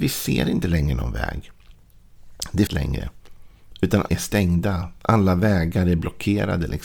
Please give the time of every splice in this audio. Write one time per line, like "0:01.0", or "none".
0:02.7
0:04.1